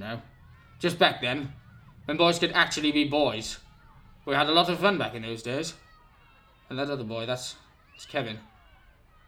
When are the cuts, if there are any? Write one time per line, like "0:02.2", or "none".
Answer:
none